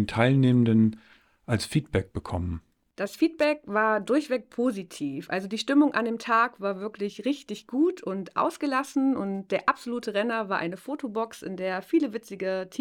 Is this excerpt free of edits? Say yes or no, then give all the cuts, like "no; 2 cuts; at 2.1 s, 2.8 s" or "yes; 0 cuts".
yes; 0 cuts